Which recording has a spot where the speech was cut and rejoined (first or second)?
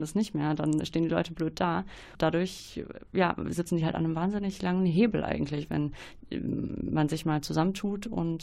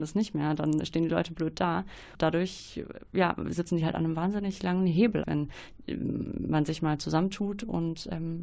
second